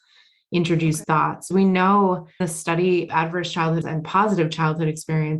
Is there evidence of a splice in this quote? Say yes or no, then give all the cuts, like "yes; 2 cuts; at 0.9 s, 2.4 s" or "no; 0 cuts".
yes; 5 cuts; at 1.0 s, 1.5 s, 2.4 s, 3.1 s, 3.8 s